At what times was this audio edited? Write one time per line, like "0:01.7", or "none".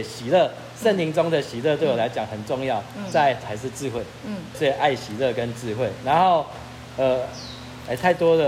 0:04.5